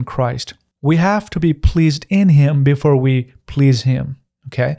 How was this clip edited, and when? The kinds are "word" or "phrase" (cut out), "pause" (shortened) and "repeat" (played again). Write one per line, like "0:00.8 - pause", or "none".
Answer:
none